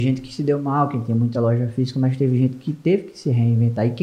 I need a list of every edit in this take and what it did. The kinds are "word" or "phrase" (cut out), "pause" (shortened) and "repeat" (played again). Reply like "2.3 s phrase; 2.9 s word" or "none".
none